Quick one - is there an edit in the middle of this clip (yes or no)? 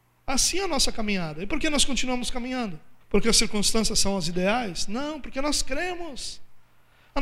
yes